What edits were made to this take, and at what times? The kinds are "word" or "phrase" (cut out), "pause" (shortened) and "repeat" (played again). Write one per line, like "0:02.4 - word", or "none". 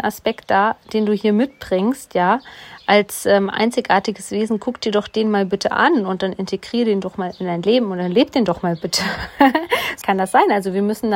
0:10.0 - word